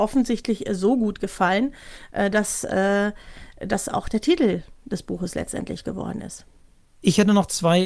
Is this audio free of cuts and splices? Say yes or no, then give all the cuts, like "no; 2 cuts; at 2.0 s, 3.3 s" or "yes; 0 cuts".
yes; 0 cuts